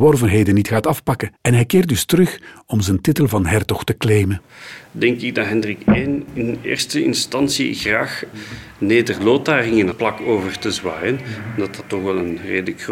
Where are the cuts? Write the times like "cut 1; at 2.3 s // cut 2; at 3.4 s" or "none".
cut 1; at 1.3 s // cut 2; at 8.3 s // cut 3; at 9.9 s